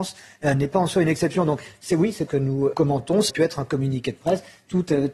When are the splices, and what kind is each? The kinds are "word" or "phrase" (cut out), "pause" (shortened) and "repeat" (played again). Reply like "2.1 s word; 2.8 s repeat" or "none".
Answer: 2.3 s phrase; 2.7 s word; 3.3 s word